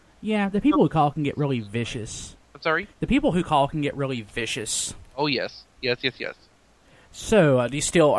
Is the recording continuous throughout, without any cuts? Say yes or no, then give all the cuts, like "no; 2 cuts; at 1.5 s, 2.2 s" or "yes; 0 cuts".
no; 2 cuts; at 2.4 s, 2.9 s